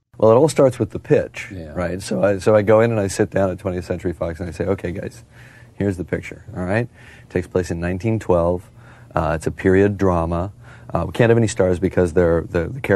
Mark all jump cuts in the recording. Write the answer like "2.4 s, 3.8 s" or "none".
none

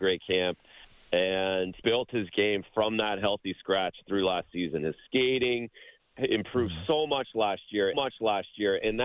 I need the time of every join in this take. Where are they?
1.8 s, 7.9 s

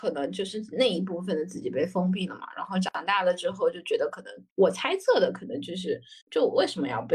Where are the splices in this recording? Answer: 4.5 s, 6.2 s

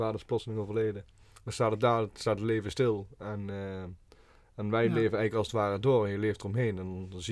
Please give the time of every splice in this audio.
none

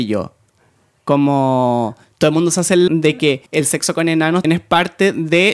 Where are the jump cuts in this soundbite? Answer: 2.9 s, 3.5 s, 4.4 s

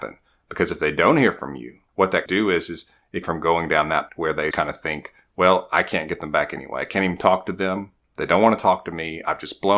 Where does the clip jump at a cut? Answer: 1.9 s, 2.3 s, 3.2 s, 4.1 s, 4.5 s

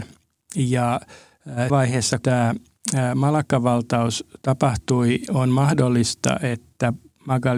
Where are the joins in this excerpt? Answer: 1.7 s, 2.2 s, 5.3 s

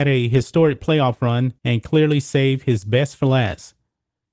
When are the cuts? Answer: 1.6 s

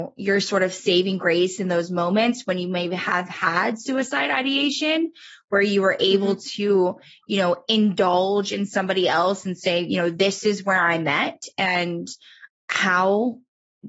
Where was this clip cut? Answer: 12.5 s

